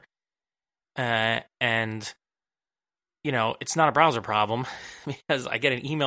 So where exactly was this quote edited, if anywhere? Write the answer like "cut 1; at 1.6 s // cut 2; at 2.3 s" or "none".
none